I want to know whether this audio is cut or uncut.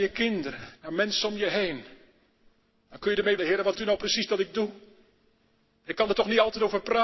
cut